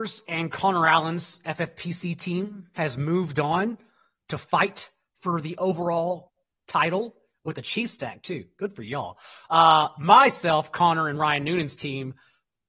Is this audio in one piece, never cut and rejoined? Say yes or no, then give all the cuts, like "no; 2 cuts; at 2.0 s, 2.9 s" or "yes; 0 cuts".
yes; 0 cuts